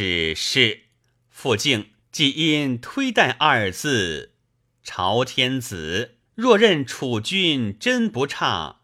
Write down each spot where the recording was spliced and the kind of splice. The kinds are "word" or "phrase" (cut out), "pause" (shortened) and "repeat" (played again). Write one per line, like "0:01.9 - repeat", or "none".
0:02.0 - pause
0:06.2 - pause